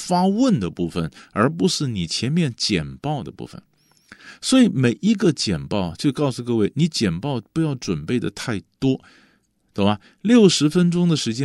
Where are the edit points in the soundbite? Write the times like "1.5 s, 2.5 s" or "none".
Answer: none